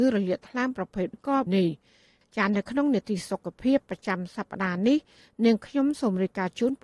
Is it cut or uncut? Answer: cut